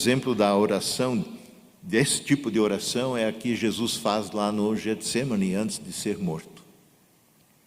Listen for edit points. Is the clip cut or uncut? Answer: uncut